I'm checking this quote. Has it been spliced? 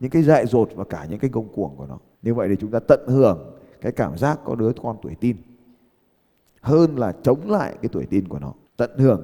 no; 0 cuts

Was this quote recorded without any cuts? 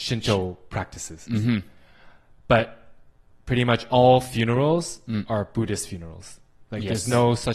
yes; 0 cuts

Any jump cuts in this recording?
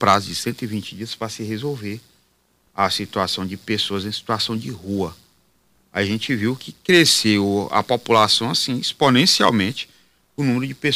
no; 0 cuts

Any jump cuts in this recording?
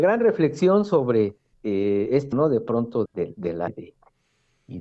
yes; 4 cuts; at 1.5 s, 2.3 s, 3.1 s, 3.7 s

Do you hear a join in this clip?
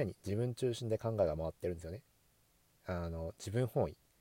no; 0 cuts

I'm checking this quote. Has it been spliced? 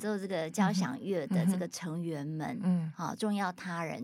no; 0 cuts

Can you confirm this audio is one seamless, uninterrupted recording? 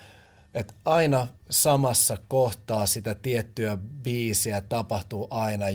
no; 1 cut; at 1.4 s

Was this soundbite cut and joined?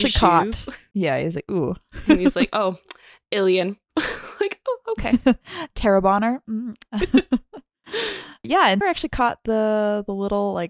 yes; 1 cut; at 8.8 s

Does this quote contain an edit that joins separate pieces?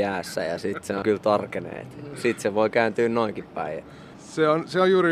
yes; 1 cut; at 1.0 s

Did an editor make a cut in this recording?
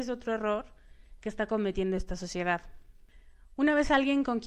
no; 0 cuts

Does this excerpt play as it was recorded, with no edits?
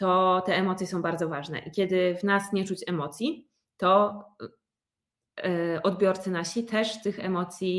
yes; 0 cuts

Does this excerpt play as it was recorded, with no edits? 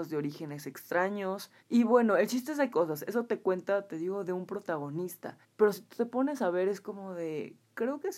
no; 3 cuts; at 1.6 s, 2.7 s, 5.4 s

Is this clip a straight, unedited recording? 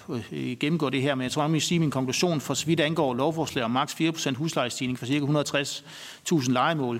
yes; 0 cuts

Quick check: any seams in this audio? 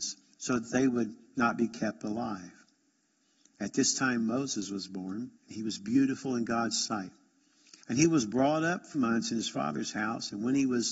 yes; 3 cuts; at 5.4 s, 7.8 s, 8.9 s

